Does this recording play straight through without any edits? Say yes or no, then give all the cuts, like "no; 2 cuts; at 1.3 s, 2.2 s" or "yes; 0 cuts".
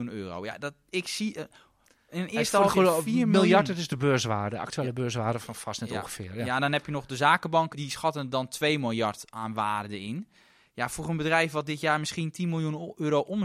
no; 1 cut; at 7.7 s